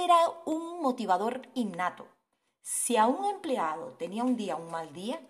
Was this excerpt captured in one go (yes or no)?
yes